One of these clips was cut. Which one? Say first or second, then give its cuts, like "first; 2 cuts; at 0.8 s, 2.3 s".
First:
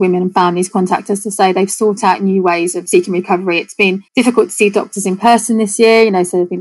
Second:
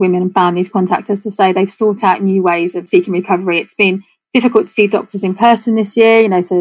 first; 1 cut; at 4.1 s